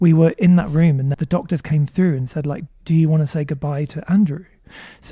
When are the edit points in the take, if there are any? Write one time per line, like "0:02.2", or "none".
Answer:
0:01.1
0:02.7